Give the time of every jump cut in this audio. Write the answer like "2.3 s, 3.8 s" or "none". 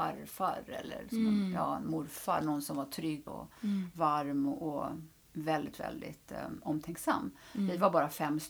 3.3 s

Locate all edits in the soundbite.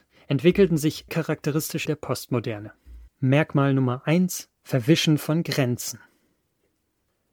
1.1 s, 1.9 s, 3.1 s, 4.6 s

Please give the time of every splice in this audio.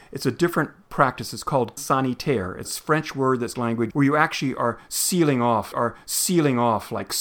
1.8 s, 2.6 s, 3.6 s, 3.9 s, 5.7 s

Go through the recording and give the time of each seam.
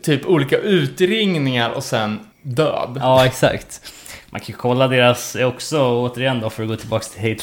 2.3 s

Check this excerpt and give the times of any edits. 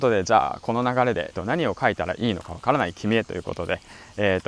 1.3 s

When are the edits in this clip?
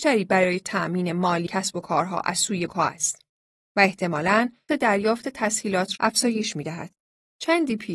1.5 s, 2.7 s, 4.7 s, 5.9 s

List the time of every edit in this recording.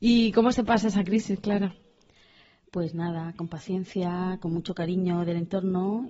none

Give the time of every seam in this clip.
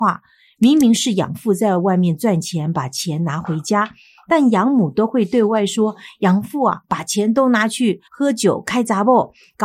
8.1 s

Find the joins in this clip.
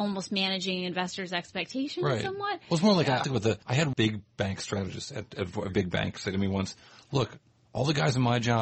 3.2 s, 3.6 s, 3.9 s, 5.7 s

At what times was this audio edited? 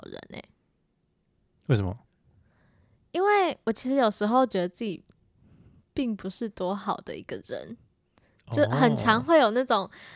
none

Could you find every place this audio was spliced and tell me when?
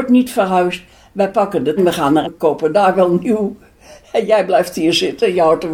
1.8 s, 2.2 s

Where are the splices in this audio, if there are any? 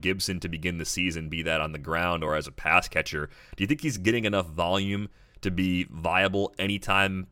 none

